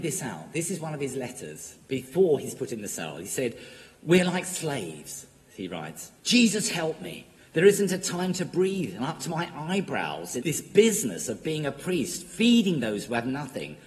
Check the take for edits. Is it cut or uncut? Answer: cut